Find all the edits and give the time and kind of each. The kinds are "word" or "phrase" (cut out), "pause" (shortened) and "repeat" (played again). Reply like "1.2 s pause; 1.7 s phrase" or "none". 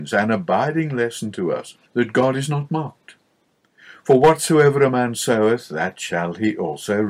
1.8 s pause